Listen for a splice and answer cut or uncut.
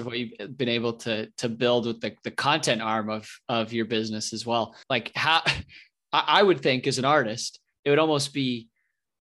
cut